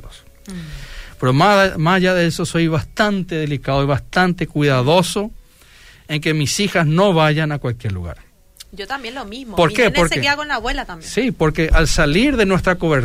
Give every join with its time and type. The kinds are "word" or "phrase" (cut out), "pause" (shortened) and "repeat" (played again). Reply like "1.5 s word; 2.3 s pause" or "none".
none